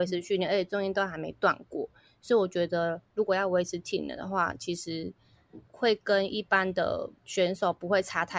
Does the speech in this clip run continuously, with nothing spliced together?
no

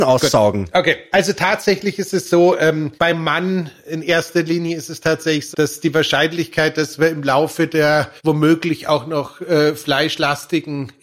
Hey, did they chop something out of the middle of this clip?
yes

